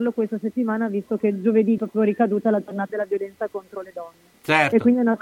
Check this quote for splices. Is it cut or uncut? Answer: cut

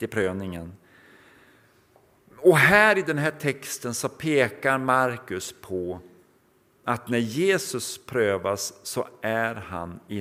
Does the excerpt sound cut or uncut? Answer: uncut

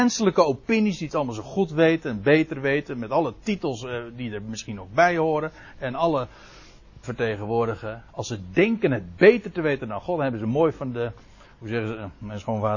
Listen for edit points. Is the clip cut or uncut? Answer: cut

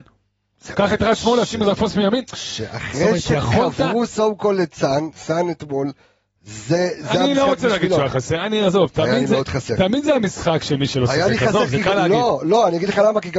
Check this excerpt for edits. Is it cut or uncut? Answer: uncut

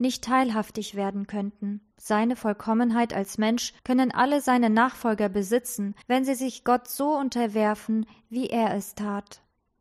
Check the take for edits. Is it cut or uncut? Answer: cut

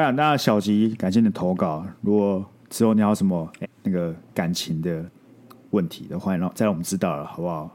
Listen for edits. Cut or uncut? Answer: cut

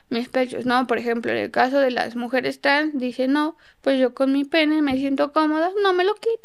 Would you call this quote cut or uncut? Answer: uncut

